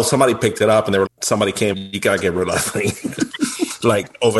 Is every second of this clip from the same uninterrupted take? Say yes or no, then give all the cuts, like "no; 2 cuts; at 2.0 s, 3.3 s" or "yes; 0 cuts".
no; 2 cuts; at 1.1 s, 1.7 s